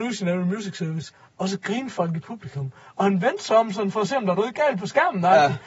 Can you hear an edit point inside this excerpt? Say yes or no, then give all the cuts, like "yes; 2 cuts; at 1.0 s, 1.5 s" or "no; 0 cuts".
no; 0 cuts